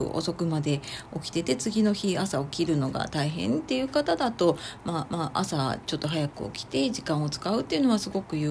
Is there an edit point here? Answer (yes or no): yes